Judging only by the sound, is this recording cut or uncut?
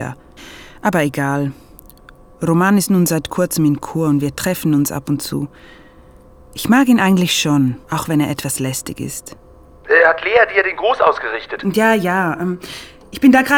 cut